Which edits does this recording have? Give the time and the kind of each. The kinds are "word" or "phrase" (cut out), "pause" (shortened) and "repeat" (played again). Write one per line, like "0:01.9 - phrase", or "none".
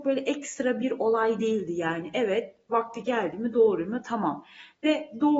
none